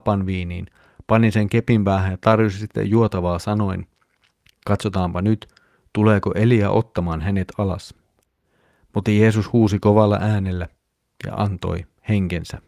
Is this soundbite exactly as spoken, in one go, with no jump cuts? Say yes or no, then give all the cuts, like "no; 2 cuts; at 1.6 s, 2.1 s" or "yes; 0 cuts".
yes; 0 cuts